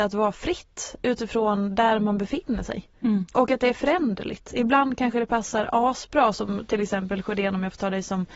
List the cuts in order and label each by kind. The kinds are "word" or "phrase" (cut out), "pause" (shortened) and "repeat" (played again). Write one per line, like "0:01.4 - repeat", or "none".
none